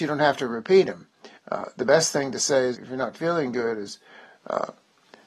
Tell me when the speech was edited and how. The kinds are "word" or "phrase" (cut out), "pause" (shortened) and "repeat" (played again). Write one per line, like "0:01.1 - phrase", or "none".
0:01.4 - pause
0:02.7 - word